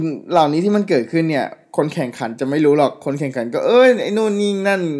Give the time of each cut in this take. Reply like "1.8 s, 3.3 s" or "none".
1.6 s